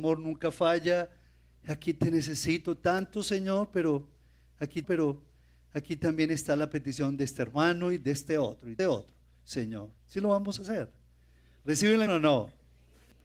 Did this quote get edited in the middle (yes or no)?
yes